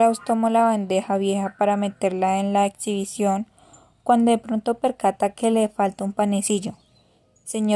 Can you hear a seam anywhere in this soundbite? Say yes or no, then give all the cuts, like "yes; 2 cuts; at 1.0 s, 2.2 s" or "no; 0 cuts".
no; 0 cuts